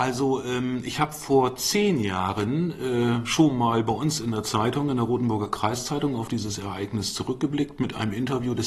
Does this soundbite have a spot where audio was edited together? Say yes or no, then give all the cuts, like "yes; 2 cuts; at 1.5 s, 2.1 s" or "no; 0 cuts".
no; 0 cuts